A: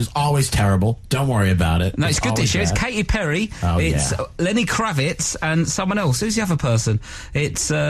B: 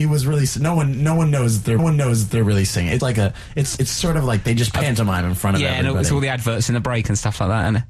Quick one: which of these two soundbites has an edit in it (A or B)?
B